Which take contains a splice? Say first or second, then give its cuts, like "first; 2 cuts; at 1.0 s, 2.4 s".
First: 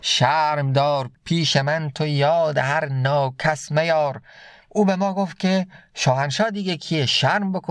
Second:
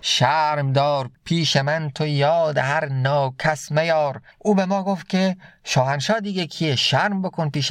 second; 1 cut; at 4.3 s